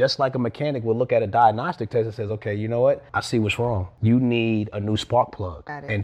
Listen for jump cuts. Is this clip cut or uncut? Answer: uncut